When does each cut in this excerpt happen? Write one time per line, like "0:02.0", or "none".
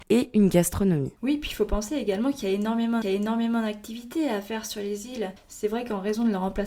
0:01.2
0:03.0
0:05.4